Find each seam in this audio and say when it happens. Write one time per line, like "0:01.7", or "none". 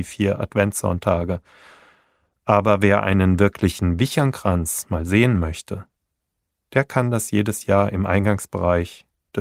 none

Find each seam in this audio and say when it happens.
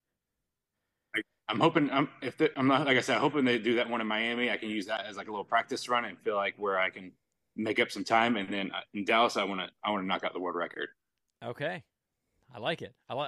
none

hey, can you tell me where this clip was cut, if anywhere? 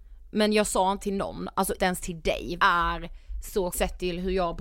0:01.0
0:01.8
0:02.6
0:03.7

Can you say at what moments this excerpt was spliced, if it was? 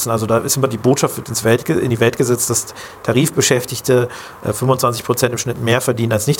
none

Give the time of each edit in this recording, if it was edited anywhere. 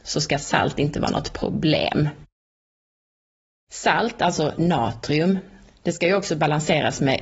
none

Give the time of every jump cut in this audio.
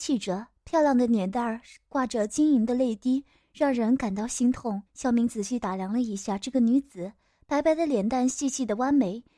0:04.9

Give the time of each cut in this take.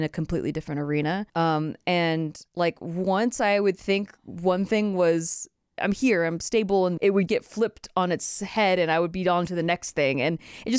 0:01.3
0:02.5
0:05.8
0:07.0
0:07.3

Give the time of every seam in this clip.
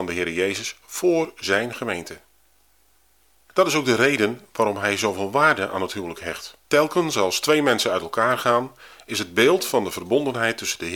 0:06.6

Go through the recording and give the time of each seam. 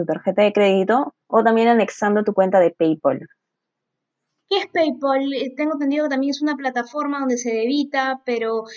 0:01.2

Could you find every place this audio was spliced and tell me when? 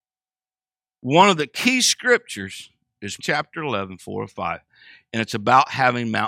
0:03.2

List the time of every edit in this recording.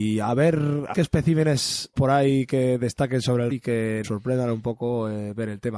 0:00.9
0:01.9
0:03.5
0:04.0

